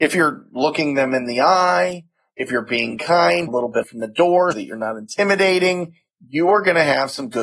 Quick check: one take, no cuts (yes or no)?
no